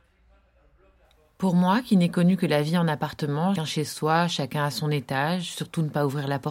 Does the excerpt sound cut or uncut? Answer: cut